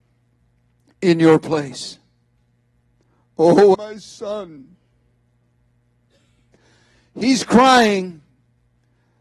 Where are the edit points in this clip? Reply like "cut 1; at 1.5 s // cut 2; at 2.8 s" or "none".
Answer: cut 1; at 3.7 s